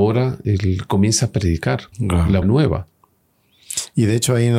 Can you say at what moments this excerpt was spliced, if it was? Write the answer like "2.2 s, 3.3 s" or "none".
1.9 s, 2.4 s